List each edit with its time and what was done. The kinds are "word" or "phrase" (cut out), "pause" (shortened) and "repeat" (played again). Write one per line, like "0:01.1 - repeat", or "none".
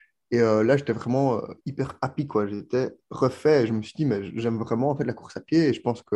0:01.6 - pause
0:03.0 - pause